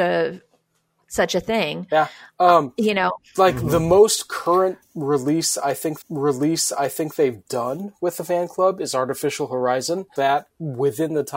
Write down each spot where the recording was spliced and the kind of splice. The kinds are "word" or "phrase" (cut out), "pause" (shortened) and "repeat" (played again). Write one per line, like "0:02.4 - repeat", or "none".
0:06.0 - repeat
0:10.2 - phrase

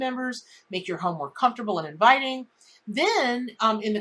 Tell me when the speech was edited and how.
none

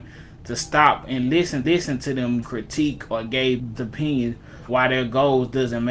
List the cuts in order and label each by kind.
0:01.6 - repeat
0:02.4 - phrase
0:03.8 - word
0:04.7 - word

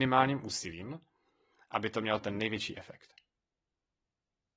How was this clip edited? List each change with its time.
none

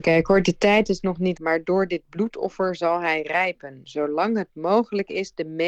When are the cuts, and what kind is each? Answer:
0:01.4 - word

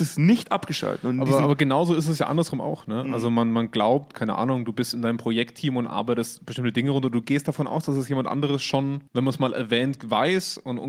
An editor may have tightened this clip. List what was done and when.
0:09.1 - pause

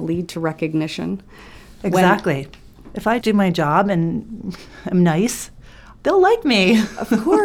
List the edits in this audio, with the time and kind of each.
0:03.2 - word
0:06.0 - pause

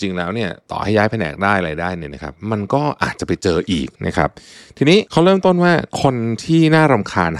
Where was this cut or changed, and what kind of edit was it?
0:04.0 - pause
0:05.1 - pause

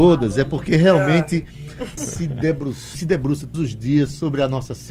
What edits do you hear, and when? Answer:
0:02.0 - word
0:02.9 - word
0:03.5 - word

